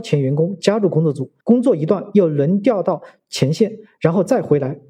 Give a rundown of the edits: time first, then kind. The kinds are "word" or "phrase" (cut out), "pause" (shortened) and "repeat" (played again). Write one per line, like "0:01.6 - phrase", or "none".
0:01.4 - pause